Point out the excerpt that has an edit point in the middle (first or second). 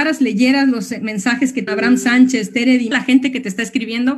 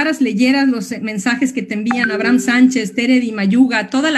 first